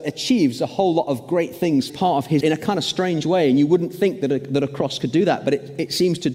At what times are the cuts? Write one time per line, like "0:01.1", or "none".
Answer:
0:01.9
0:02.4